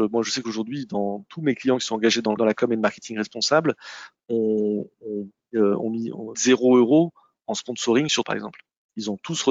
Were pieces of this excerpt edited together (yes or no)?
yes